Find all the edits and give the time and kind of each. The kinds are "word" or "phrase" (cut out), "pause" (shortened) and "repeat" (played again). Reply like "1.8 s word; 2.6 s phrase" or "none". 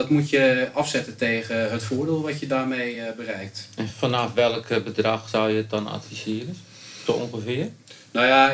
none